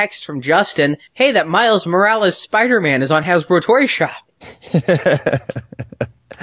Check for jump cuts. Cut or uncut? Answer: uncut